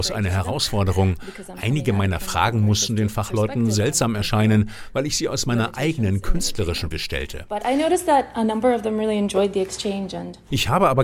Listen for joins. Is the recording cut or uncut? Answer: cut